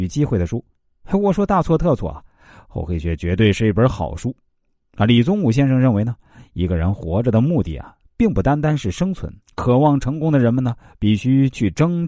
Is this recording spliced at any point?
yes; 1 cut; at 9.4 s

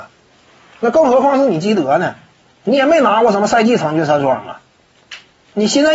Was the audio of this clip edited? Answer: no; 0 cuts

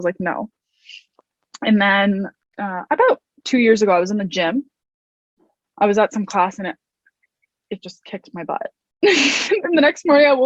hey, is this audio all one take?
yes; 0 cuts

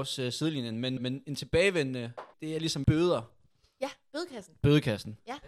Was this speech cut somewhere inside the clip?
yes; 3 cuts; at 1.0 s, 2.3 s, 2.8 s

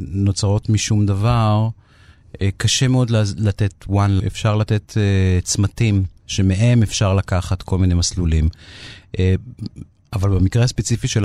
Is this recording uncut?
no; 2 cuts; at 4.2 s, 6.2 s

